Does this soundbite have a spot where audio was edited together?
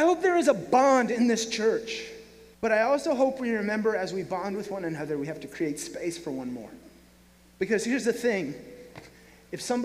yes; 1 cut; at 2.5 s

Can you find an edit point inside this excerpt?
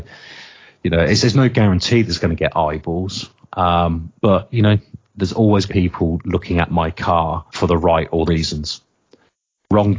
yes; 4 cuts; at 4.2 s, 5.7 s, 7.5 s, 8.3 s

